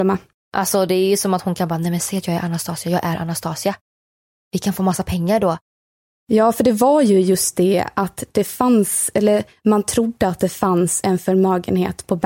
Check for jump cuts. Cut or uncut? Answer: uncut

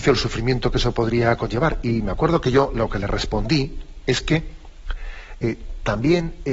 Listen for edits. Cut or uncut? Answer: uncut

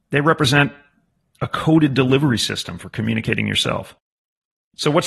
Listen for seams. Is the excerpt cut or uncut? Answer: uncut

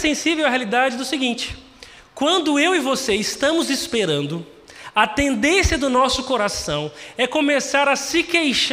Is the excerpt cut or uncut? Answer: uncut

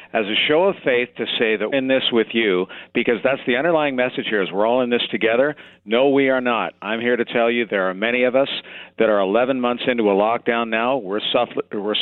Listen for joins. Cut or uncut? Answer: cut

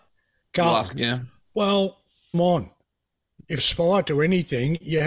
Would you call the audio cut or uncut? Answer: cut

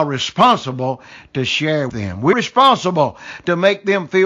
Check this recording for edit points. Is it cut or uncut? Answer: cut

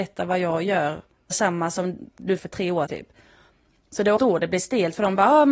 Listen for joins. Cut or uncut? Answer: cut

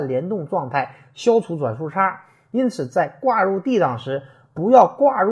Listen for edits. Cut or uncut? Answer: uncut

